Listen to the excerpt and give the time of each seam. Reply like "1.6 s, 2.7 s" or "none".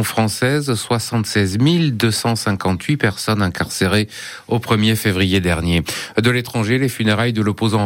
none